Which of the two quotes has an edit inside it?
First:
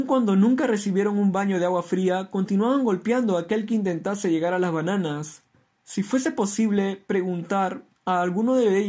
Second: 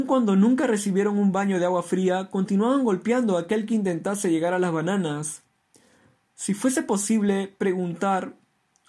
first; 2 cuts; at 5.5 s, 8.0 s

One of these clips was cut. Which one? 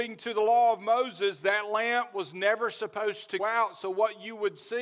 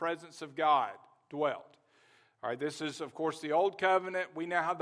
first; 1 cut; at 3.4 s

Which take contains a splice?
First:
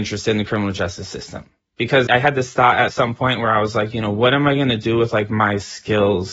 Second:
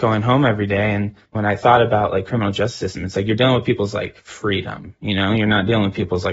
second; 1 cut; at 1.2 s

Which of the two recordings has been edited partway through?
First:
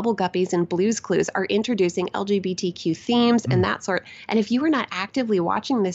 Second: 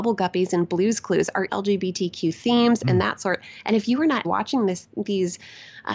second; 2 cuts; at 1.5 s, 4.2 s

